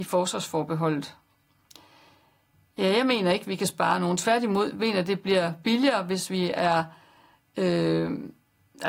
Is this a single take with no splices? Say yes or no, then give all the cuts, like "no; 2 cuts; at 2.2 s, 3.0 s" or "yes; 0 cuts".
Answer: yes; 0 cuts